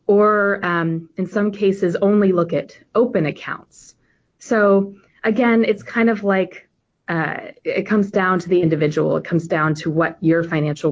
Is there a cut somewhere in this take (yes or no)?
no